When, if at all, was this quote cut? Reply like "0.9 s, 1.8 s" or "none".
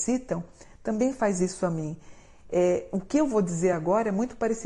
none